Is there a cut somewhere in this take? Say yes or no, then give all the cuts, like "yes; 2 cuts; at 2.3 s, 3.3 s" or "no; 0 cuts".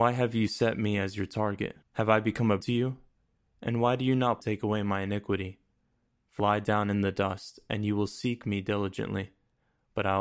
yes; 4 cuts; at 1.8 s, 2.6 s, 4.4 s, 6.4 s